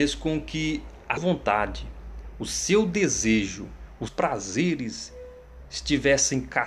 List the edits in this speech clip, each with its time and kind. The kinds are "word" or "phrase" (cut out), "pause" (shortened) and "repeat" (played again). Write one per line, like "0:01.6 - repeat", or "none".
0:01.2 - word
0:04.1 - word